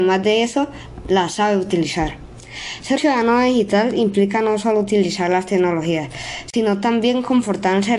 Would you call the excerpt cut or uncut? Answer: cut